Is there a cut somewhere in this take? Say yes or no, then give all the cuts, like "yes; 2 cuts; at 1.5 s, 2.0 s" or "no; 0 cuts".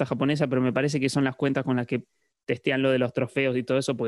no; 0 cuts